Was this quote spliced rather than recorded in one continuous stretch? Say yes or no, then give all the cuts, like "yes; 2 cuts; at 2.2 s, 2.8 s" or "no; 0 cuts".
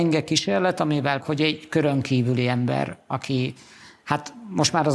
yes; 1 cut; at 1.2 s